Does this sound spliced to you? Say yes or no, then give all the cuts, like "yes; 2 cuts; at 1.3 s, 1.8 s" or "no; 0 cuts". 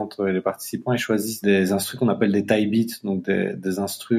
no; 0 cuts